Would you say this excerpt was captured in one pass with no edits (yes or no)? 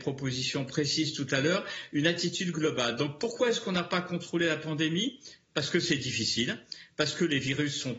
yes